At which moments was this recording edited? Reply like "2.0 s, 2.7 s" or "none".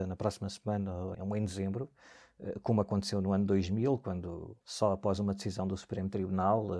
1.1 s, 4.6 s